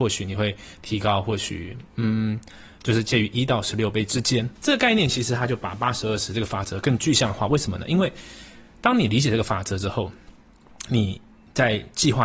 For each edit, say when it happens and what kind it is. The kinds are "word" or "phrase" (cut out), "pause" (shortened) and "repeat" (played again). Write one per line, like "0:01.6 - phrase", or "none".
0:04.6 - word